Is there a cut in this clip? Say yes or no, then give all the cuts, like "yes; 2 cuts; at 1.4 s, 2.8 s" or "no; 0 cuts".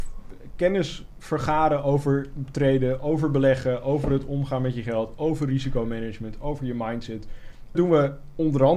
yes; 1 cut; at 7.7 s